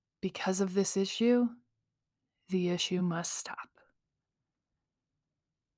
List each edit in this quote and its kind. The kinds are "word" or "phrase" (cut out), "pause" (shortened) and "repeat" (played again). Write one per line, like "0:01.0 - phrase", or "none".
none